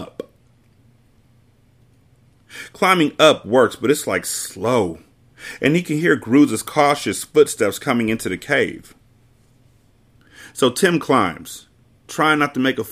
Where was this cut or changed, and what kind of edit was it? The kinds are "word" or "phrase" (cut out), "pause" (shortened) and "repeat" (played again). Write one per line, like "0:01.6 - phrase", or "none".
none